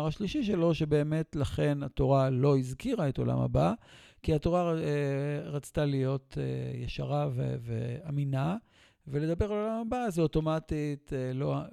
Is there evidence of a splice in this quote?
no; 0 cuts

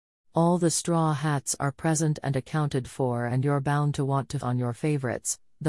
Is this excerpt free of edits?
no; 1 cut; at 4.4 s

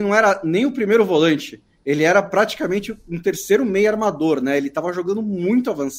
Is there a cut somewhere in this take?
no; 0 cuts

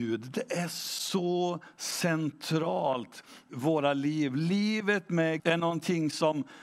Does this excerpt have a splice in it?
yes; 2 cuts; at 3.5 s, 5.4 s

